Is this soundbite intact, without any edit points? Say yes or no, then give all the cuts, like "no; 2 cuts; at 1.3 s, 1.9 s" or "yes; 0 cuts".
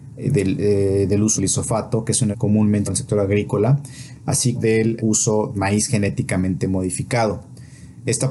no; 6 cuts; at 1.4 s, 2.3 s, 2.9 s, 4.5 s, 5.0 s, 5.5 s